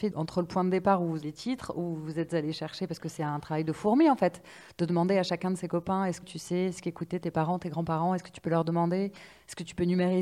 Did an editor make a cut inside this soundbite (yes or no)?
yes